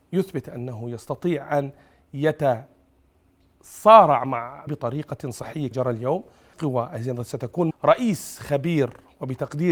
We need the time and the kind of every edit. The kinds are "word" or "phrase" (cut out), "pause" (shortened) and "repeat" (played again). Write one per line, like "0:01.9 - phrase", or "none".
0:04.7 - word
0:05.7 - word
0:06.5 - word
0:07.7 - word

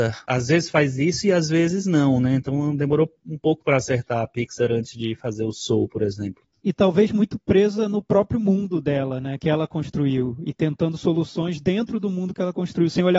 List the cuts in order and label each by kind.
none

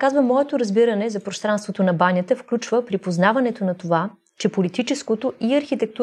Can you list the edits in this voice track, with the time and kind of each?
none

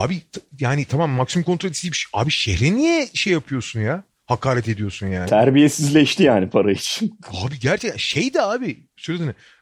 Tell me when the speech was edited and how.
none

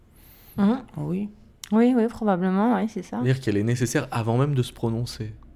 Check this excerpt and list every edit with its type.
none

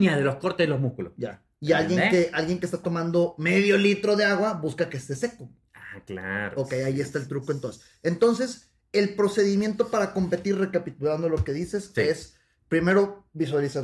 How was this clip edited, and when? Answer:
none

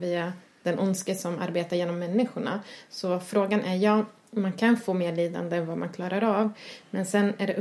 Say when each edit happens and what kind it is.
none

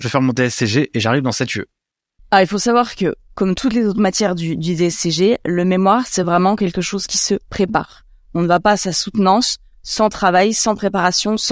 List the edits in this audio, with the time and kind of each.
none

